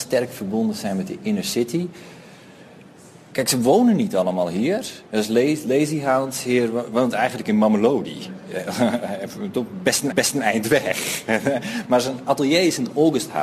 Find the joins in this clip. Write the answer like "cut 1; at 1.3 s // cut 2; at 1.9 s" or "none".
cut 1; at 10.1 s